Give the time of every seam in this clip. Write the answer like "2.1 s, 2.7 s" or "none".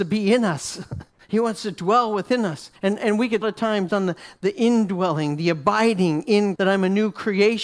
1.2 s, 2.8 s, 3.4 s, 3.9 s, 6.6 s